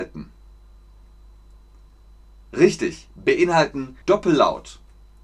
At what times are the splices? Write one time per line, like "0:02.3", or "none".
0:04.0